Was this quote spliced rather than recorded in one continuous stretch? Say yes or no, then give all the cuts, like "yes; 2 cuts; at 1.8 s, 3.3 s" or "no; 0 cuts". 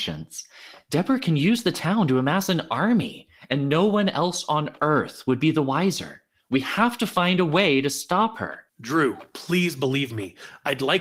yes; 2 cuts; at 6.4 s, 8.7 s